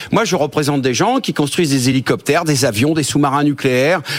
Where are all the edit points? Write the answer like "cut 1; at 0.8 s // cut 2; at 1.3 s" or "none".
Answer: none